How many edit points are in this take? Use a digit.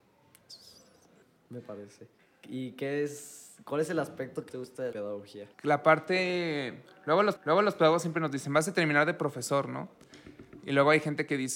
6